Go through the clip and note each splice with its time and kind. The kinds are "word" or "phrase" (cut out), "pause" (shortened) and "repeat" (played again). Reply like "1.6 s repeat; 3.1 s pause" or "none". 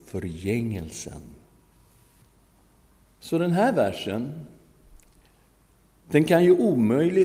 none